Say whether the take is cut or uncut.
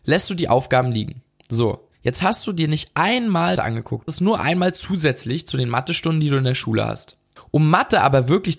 cut